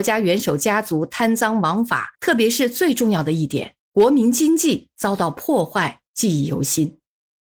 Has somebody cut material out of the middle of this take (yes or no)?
yes